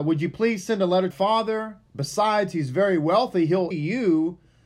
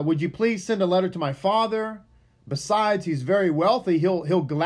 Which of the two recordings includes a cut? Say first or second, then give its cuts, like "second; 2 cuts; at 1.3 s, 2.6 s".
first; 3 cuts; at 1.1 s, 1.9 s, 3.7 s